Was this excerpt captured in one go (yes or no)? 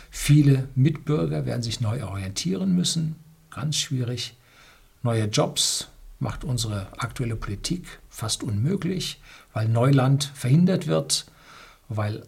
yes